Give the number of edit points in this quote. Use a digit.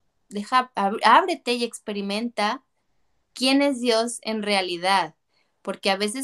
0